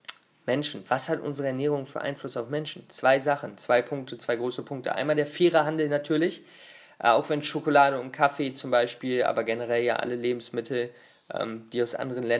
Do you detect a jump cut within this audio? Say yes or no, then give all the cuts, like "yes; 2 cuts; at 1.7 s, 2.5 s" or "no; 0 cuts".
no; 0 cuts